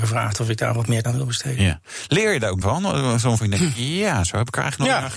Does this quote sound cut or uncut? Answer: cut